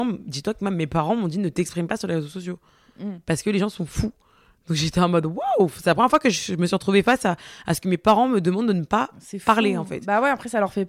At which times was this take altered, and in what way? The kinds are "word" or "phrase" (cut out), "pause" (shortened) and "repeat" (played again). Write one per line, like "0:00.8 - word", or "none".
none